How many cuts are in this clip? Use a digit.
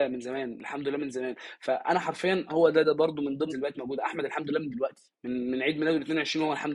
3